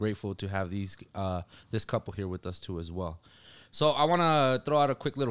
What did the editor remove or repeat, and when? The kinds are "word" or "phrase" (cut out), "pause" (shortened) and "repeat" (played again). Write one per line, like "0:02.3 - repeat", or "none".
none